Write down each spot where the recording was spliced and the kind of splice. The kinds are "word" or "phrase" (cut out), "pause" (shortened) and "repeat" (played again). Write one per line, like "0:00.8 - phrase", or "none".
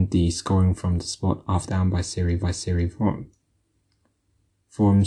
0:01.7 - phrase
0:02.4 - repeat